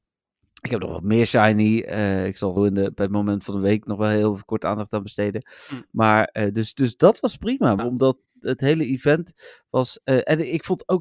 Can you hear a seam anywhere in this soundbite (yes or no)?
yes